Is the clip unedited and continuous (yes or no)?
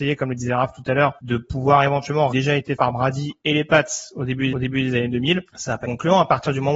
no